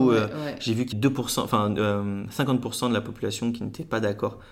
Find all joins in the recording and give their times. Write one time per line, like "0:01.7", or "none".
0:00.9